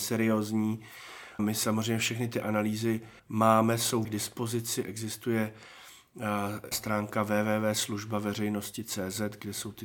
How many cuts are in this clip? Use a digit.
4